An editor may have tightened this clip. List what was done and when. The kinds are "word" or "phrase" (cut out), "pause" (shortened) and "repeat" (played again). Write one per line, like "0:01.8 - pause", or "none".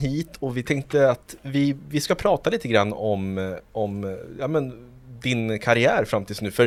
none